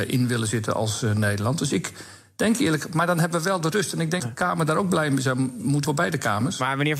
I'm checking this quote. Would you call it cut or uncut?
cut